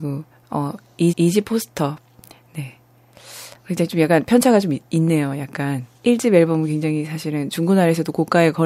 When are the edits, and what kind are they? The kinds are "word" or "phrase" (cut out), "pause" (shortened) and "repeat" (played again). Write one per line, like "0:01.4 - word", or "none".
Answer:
0:01.1 - repeat
0:03.6 - pause
0:05.9 - pause